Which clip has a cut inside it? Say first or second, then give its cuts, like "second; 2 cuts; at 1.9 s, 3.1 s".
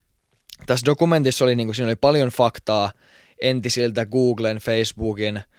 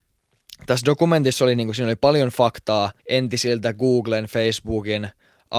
second; 1 cut; at 3.0 s